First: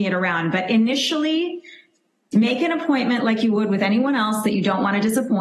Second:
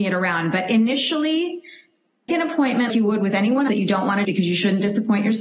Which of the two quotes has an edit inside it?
second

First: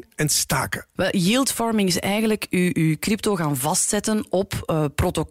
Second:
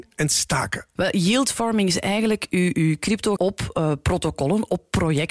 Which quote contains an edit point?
second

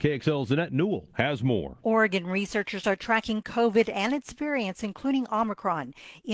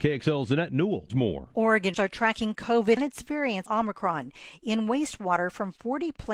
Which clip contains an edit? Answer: second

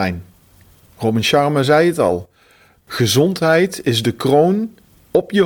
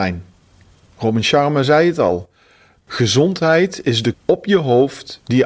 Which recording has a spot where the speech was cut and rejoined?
second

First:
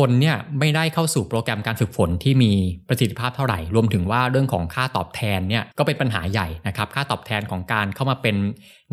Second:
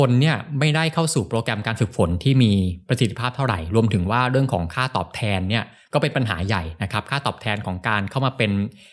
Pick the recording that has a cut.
first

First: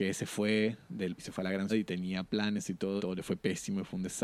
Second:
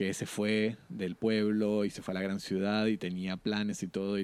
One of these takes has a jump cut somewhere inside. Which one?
first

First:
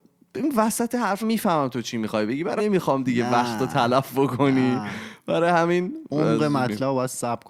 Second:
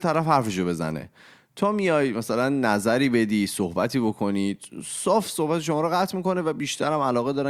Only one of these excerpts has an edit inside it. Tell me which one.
first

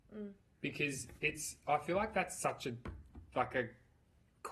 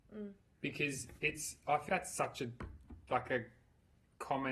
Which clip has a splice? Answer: second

